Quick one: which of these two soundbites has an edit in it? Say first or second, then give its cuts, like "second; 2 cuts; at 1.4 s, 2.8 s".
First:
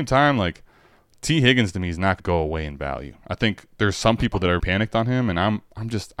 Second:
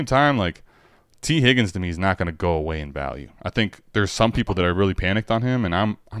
first; 2 cuts; at 2.2 s, 4.6 s